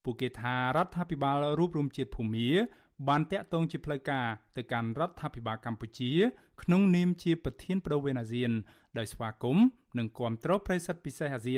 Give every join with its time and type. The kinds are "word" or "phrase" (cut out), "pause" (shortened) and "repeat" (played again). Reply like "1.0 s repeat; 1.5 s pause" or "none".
none